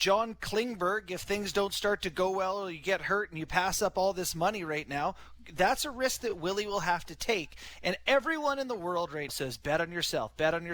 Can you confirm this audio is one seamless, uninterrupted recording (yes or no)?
no